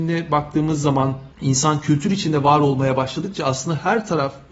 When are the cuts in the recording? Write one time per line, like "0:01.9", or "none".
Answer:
none